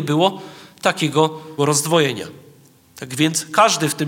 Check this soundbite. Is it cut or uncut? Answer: cut